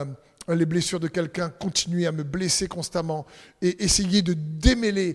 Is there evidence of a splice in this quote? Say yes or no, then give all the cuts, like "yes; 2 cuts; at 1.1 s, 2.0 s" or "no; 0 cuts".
no; 0 cuts